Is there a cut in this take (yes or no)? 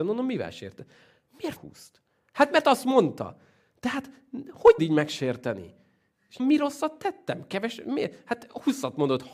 yes